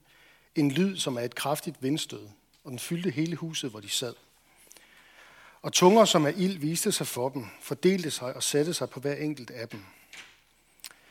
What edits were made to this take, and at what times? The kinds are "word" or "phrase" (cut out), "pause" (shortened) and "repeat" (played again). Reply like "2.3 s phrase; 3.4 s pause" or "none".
none

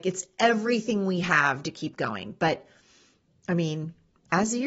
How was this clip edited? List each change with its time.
none

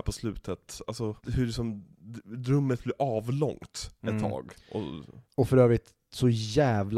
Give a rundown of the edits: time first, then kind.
1.2 s pause; 5.2 s pause

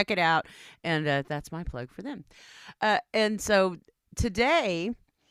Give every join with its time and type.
none

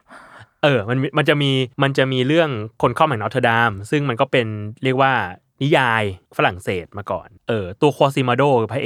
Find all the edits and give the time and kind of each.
1.7 s pause; 6.3 s pause; 7.4 s pause

